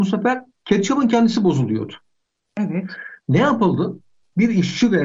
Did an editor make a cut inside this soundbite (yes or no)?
no